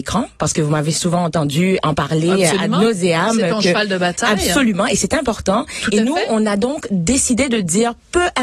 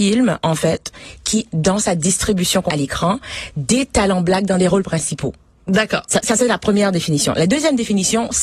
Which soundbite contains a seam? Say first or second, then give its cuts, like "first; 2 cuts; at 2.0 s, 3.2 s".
second; 3 cuts; at 1.5 s, 2.7 s, 6.2 s